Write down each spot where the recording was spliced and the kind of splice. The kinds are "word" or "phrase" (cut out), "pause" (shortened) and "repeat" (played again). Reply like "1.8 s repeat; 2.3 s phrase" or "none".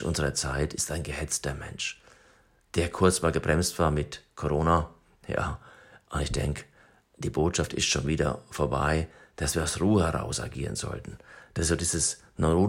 none